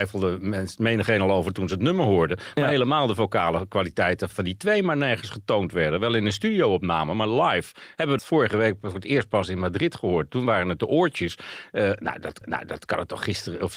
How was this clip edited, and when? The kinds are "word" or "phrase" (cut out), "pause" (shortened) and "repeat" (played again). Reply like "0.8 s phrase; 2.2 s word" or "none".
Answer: 4.3 s word; 8.2 s phrase; 12.4 s repeat